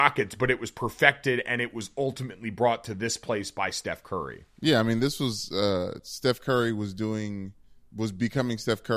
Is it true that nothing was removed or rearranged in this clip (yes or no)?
no